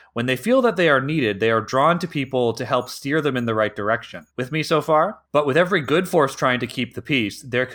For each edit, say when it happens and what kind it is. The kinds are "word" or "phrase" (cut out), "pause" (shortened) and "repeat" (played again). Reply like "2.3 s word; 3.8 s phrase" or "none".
4.3 s pause; 5.3 s pause